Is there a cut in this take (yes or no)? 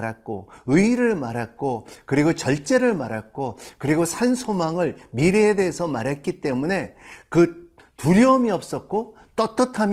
no